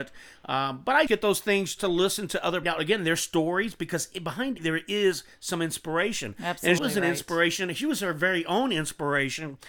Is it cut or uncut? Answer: cut